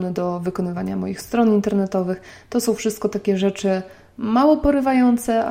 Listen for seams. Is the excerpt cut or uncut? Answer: uncut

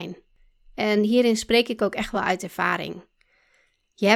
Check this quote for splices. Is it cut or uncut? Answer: uncut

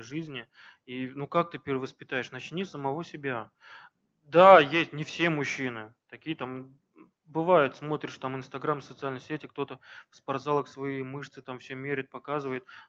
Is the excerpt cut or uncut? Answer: uncut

